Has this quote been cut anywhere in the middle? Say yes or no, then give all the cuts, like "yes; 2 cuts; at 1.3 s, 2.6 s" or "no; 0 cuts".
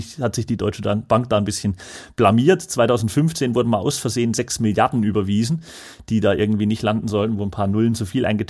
no; 0 cuts